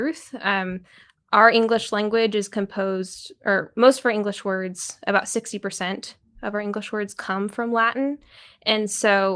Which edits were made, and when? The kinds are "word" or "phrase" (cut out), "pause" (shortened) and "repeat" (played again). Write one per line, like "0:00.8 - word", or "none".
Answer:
none